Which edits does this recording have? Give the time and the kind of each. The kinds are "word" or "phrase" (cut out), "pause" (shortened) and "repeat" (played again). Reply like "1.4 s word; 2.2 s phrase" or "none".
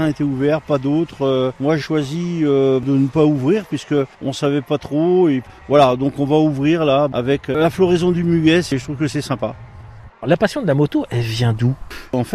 1.8 s word; 4.1 s pause; 10.1 s pause